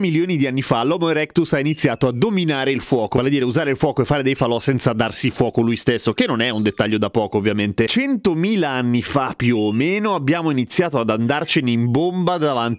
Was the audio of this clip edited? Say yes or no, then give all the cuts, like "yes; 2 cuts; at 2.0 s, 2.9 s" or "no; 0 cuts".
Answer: no; 0 cuts